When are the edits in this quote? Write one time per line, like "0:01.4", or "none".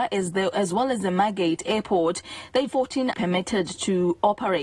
0:02.7
0:03.1